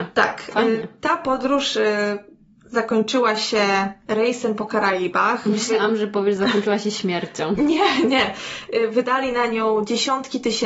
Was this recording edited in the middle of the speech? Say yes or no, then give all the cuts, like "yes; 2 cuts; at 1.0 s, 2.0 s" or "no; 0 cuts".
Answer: no; 0 cuts